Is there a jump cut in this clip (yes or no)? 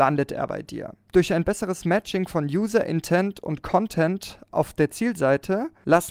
no